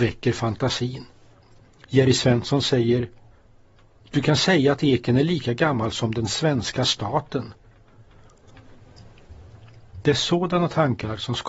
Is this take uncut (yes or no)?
yes